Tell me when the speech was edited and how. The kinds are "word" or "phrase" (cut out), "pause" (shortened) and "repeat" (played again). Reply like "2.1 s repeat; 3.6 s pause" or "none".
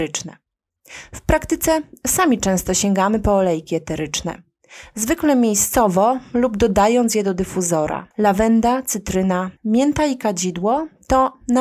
8.1 s pause; 9.6 s pause